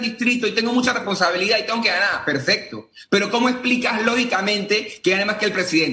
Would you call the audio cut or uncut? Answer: uncut